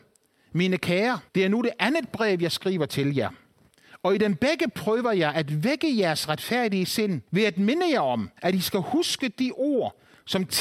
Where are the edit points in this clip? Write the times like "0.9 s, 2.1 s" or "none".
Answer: 1.3 s, 7.3 s, 8.4 s